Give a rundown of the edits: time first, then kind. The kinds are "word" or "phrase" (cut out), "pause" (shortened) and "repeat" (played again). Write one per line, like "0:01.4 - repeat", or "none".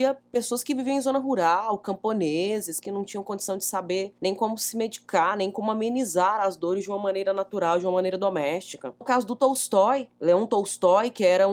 0:02.8 - word
0:09.0 - word